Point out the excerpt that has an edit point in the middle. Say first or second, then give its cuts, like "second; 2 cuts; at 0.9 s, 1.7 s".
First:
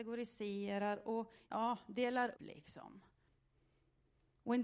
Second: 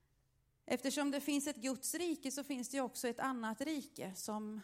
first; 2 cuts; at 1.4 s, 2.3 s